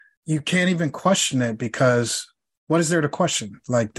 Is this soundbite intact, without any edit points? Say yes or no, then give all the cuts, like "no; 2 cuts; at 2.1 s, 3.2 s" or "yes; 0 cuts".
yes; 0 cuts